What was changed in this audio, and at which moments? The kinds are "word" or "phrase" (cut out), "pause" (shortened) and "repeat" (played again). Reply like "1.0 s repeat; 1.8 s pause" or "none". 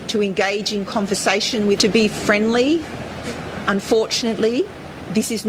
1.8 s word; 3.6 s word

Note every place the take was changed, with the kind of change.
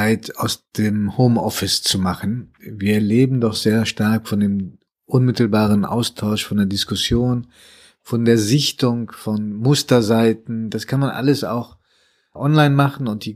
none

